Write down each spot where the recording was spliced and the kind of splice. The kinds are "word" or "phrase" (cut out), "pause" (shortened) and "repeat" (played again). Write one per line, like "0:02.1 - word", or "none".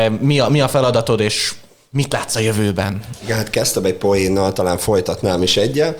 none